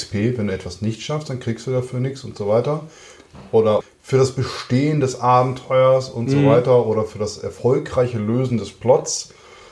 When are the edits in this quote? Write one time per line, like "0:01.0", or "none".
none